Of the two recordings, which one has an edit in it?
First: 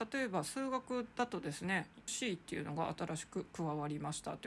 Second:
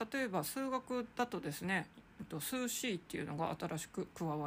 first; 1 cut; at 2.1 s

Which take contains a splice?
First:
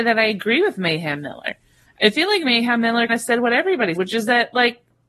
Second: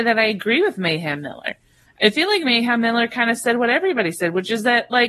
first; 2 cuts; at 3.1 s, 3.9 s

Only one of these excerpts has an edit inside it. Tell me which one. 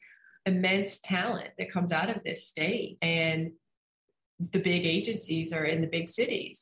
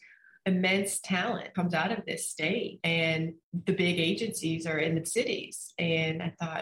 second; 3 cuts; at 1.5 s, 3.4 s, 5.0 s

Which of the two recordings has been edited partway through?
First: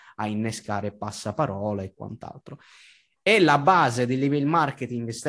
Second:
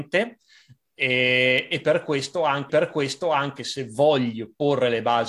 second; 1 cut; at 2.7 s

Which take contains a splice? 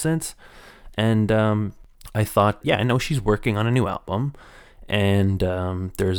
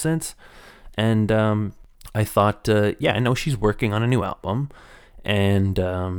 first; 1 cut; at 2.6 s

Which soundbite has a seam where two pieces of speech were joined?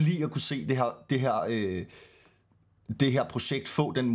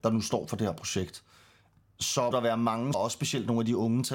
second; 2 cuts; at 2.3 s, 2.9 s

